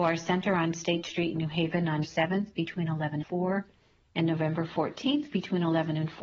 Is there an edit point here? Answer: yes; 2 cuts; at 2.0 s, 3.2 s

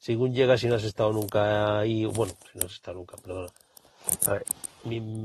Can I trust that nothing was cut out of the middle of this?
yes; 0 cuts

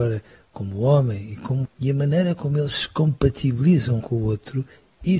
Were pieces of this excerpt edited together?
yes; 2 cuts; at 1.6 s, 4.0 s

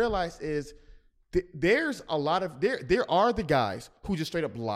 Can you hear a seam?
no; 0 cuts

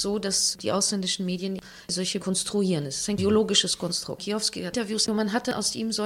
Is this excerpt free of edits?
no; 2 cuts; at 2.2 s, 5.1 s

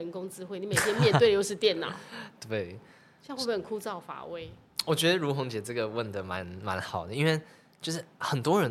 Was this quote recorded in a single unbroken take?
yes; 0 cuts

